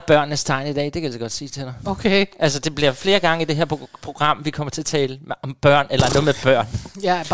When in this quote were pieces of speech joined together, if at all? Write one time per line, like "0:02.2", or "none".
none

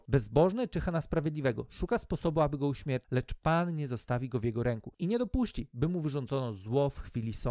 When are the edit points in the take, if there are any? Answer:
none

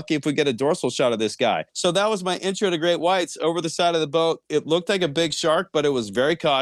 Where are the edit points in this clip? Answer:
0:01.7

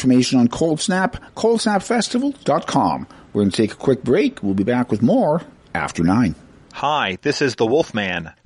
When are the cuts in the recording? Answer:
none

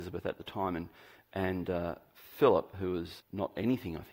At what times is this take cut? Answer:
0:03.2

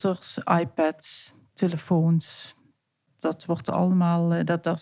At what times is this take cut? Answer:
none

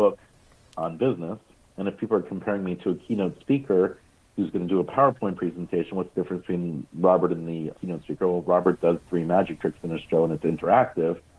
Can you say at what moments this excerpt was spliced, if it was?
0:07.7

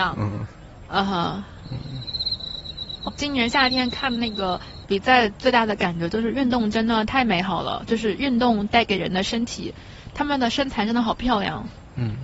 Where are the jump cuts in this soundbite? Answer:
0:03.1

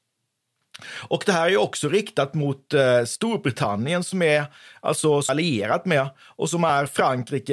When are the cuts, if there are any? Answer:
0:05.3

